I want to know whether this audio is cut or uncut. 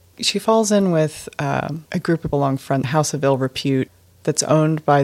cut